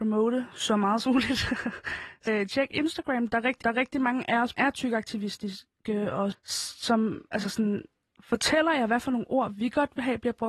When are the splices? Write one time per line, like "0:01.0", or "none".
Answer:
0:01.1
0:02.3
0:03.6
0:04.5
0:06.3